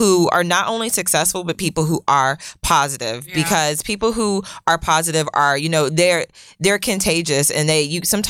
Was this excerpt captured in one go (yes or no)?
yes